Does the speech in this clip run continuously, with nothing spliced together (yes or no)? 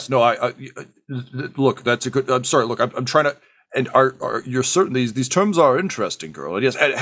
yes